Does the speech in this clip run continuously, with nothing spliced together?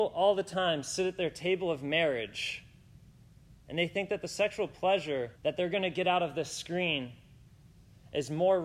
no; 1 cut; at 5.4 s

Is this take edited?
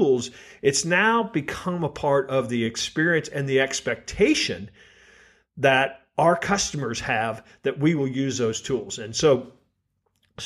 no; 0 cuts

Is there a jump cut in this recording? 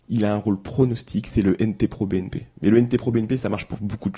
no; 0 cuts

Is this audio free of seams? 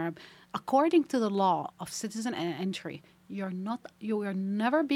no; 1 cut; at 3.9 s

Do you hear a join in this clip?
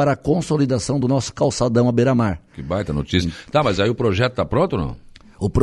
no; 0 cuts

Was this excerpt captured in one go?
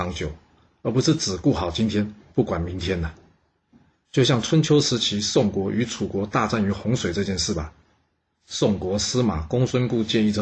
yes; 0 cuts

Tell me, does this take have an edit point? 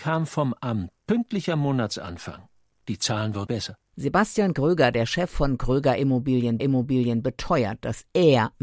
yes; 3 cuts; at 1.0 s, 3.5 s, 6.6 s

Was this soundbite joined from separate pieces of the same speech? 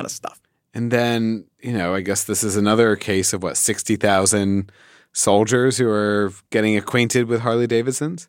no; 0 cuts

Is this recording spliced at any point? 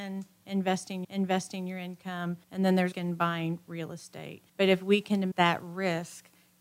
yes; 5 cuts; at 1.0 s, 2.4 s, 2.9 s, 4.5 s, 5.3 s

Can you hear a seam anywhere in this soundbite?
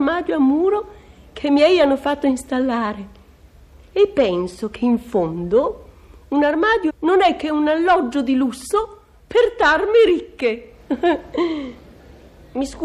yes; 1 cut; at 6.9 s

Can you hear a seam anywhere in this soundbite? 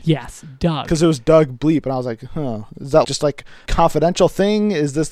yes; 2 cuts; at 3.0 s, 3.7 s

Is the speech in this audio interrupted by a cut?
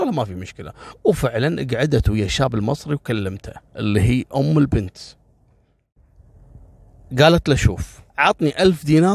yes; 2 cuts; at 3.7 s, 8.1 s

